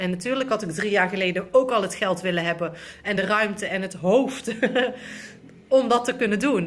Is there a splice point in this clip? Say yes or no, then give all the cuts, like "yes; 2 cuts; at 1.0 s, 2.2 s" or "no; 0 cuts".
no; 0 cuts